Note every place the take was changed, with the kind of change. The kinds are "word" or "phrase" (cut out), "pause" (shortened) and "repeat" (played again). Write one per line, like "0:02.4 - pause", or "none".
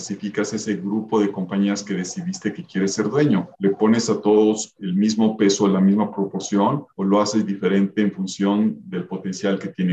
0:03.5 - pause
0:06.9 - pause